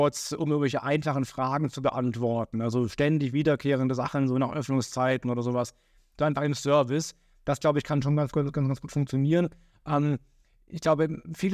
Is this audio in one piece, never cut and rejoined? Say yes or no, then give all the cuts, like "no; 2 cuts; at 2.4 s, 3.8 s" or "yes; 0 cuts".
yes; 0 cuts